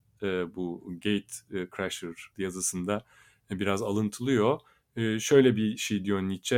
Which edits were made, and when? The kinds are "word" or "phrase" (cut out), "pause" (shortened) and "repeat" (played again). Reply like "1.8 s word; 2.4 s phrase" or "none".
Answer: 2.3 s word